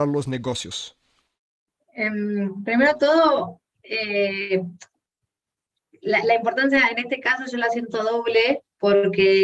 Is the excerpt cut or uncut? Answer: uncut